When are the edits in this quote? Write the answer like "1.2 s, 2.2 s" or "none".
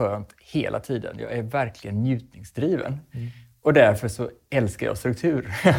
none